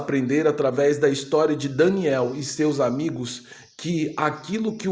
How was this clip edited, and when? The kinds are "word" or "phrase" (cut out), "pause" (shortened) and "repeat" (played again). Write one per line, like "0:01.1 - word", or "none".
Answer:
none